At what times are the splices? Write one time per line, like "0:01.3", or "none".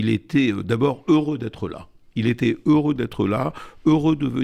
none